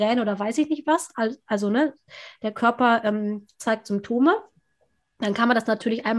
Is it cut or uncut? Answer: uncut